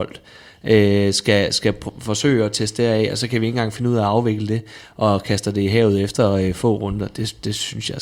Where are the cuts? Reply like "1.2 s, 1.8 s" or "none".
none